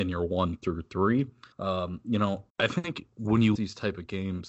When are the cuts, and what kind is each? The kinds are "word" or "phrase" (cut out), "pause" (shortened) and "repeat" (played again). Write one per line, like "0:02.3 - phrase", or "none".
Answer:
0:01.5 - pause
0:02.5 - pause
0:03.5 - word